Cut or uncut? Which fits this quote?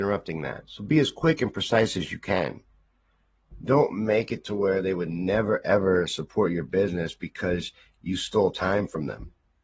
uncut